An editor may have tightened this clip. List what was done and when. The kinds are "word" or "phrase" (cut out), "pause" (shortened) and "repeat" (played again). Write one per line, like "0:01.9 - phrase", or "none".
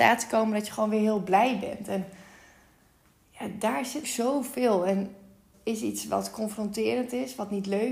0:04.0 - word
0:05.5 - word